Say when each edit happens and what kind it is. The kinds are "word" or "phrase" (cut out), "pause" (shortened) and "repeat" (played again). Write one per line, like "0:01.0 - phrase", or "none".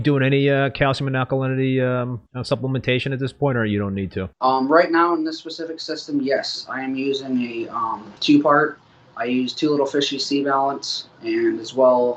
0:02.3 - pause
0:04.3 - pause
0:08.2 - pause
0:11.1 - pause